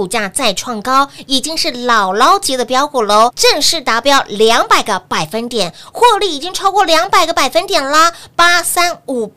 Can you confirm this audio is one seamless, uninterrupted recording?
no; 1 cut; at 3.3 s

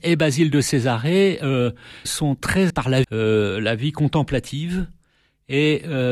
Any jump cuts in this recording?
yes; 3 cuts; at 2.0 s, 2.7 s, 3.0 s

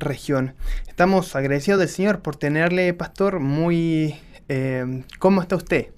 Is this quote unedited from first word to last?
yes; 0 cuts

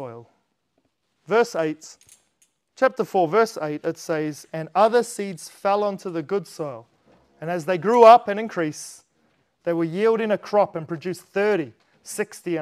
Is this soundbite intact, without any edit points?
yes; 0 cuts

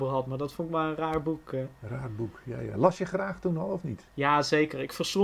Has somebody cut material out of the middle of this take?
yes; 1 cut; at 4.1 s

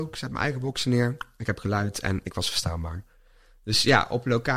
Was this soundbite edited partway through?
no; 0 cuts

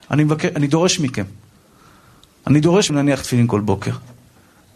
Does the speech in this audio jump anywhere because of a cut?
yes; 1 cut; at 2.9 s

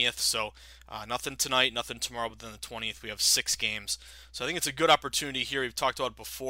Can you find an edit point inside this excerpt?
no; 0 cuts

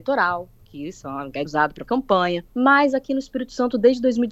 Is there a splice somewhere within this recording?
yes; 3 cuts; at 1.4 s, 1.8 s, 2.5 s

